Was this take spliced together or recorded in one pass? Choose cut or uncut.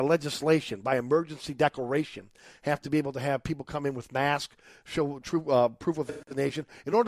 uncut